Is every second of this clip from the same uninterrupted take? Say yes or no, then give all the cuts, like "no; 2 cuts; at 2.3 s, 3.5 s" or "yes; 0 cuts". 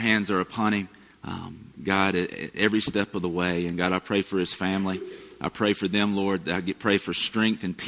no; 1 cut; at 2.3 s